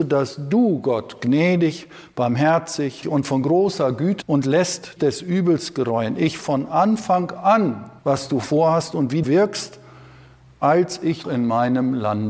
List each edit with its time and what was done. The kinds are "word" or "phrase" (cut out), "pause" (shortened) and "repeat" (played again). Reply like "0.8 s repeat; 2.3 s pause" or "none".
3.0 s word; 4.2 s word; 5.0 s word; 6.4 s word; 8.0 s pause; 9.2 s word; 11.2 s word